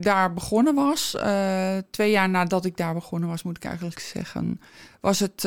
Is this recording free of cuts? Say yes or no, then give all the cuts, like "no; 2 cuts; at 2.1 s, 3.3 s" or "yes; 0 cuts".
yes; 0 cuts